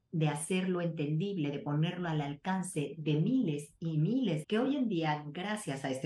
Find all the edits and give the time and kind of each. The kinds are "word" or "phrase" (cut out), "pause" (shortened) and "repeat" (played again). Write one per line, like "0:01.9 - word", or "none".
0:04.4 - phrase